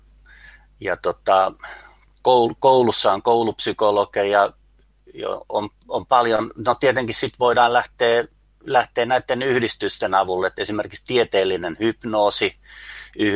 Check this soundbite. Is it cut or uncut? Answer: uncut